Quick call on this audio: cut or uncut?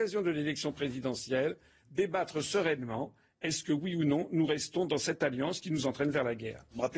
uncut